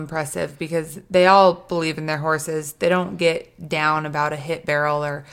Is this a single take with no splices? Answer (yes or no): yes